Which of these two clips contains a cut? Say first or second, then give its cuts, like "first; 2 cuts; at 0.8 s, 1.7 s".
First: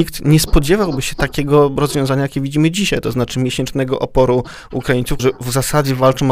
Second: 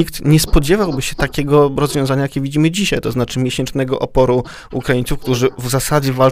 first; 1 cut; at 5.2 s